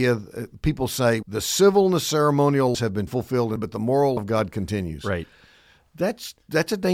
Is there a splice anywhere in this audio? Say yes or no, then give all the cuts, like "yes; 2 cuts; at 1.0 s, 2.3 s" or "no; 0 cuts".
yes; 5 cuts; at 1.2 s, 2.7 s, 3.1 s, 3.6 s, 4.2 s